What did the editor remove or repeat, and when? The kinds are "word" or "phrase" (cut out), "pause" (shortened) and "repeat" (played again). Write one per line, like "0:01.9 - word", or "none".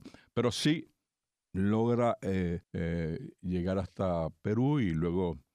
0:01.3 - pause
0:02.6 - pause